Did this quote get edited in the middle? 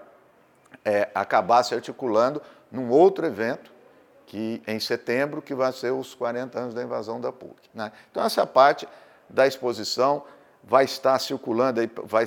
no; 0 cuts

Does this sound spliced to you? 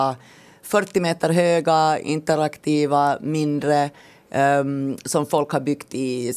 no; 0 cuts

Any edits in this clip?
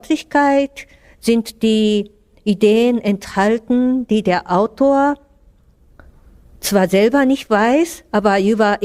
no; 0 cuts

